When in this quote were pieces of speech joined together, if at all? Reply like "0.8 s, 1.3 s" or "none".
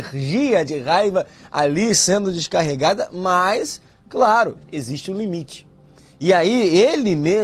none